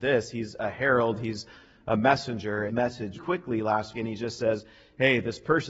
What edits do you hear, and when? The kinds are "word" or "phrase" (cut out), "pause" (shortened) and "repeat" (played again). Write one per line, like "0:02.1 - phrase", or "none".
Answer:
0:02.7 - phrase
0:03.1 - word
0:03.9 - word